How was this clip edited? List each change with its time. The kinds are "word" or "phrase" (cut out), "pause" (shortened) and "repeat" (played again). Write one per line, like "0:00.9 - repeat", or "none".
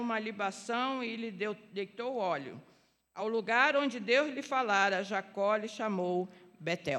none